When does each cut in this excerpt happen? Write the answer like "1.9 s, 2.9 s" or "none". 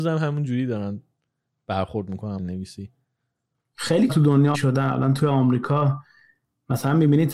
2.4 s, 4.1 s, 4.5 s